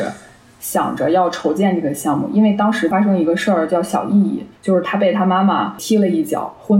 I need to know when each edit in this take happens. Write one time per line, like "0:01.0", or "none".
0:04.6